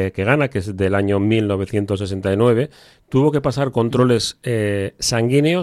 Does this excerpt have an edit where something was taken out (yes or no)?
no